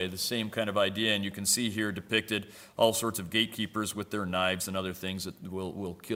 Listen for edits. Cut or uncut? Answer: uncut